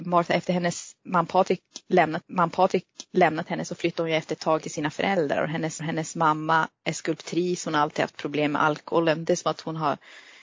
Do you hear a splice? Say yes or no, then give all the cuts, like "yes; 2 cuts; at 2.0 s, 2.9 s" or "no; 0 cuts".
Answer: yes; 3 cuts; at 2.2 s, 4.6 s, 5.8 s